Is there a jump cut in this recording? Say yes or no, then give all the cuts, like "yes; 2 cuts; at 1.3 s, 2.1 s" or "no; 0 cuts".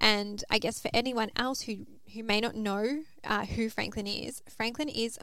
no; 0 cuts